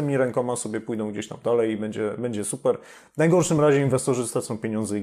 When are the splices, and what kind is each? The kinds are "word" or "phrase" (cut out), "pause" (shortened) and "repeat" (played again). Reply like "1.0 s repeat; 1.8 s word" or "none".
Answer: none